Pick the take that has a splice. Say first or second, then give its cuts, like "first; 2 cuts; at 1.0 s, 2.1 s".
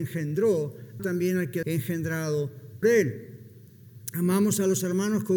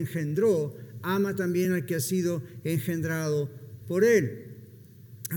first; 3 cuts; at 1.0 s, 1.6 s, 2.8 s